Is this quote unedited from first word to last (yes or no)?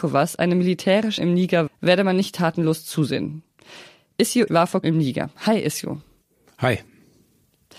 no